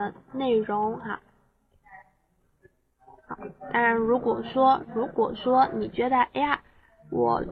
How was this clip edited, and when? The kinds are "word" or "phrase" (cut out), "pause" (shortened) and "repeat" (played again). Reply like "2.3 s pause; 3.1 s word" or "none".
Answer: 3.2 s pause